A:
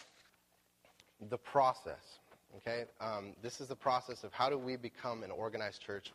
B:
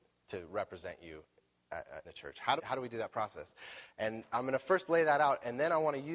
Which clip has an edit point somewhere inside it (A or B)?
B